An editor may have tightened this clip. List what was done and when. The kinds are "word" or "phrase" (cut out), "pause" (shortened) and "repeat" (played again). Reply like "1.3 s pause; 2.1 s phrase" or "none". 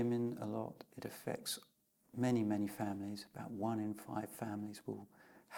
none